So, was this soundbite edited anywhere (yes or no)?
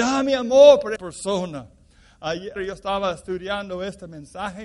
yes